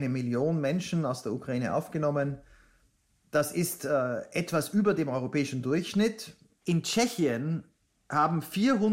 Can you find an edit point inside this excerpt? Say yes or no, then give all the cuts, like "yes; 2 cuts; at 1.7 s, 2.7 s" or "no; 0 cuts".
no; 0 cuts